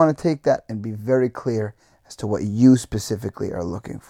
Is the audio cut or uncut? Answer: uncut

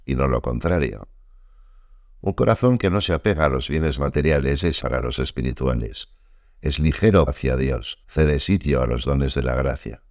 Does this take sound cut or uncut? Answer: cut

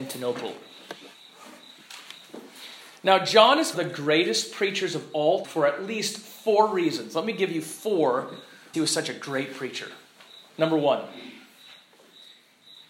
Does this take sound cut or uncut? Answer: cut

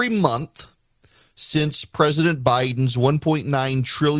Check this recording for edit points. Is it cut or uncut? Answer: uncut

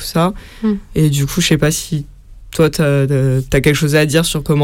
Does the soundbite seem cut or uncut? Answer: uncut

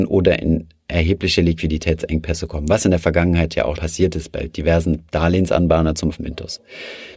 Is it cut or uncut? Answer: cut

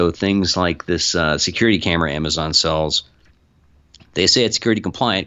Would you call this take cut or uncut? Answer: uncut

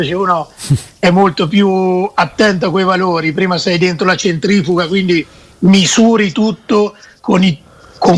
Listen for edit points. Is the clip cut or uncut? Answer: uncut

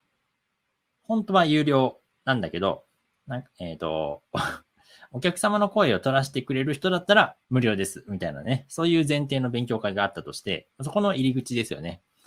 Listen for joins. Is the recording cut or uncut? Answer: cut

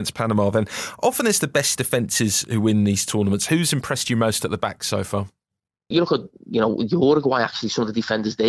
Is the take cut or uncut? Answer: uncut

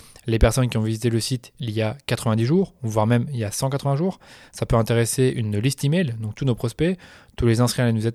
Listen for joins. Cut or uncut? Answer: uncut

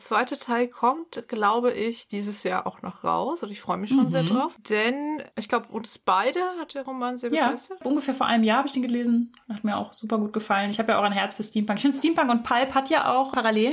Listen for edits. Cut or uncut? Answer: uncut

